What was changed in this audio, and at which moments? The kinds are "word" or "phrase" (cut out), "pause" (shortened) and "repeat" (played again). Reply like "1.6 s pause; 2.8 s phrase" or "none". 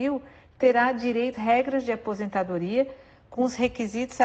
1.3 s word